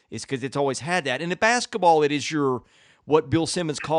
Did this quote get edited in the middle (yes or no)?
no